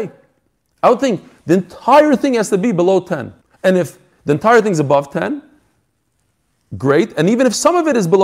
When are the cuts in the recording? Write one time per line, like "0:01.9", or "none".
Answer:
0:03.4